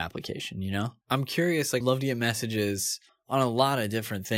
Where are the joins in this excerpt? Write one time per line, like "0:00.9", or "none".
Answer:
0:01.0
0:01.8
0:03.1